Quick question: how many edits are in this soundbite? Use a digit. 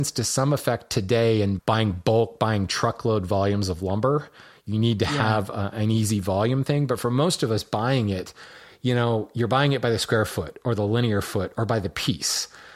2